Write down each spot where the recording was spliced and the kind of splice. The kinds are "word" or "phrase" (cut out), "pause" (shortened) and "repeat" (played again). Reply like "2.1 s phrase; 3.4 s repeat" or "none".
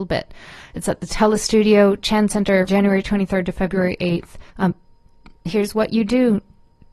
2.7 s word; 4.5 s pause